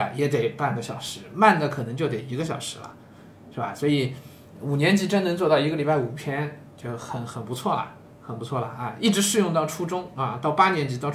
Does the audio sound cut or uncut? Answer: uncut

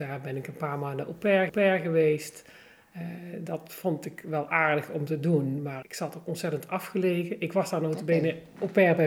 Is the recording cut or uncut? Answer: cut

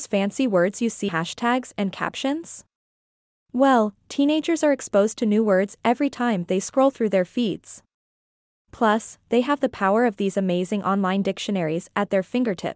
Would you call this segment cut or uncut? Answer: cut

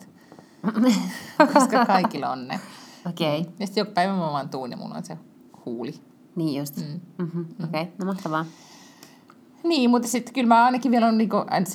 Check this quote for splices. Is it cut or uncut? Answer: uncut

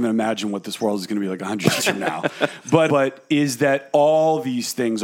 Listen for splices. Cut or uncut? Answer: cut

